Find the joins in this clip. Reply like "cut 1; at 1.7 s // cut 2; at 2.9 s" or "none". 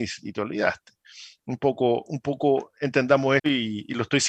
cut 1; at 3.4 s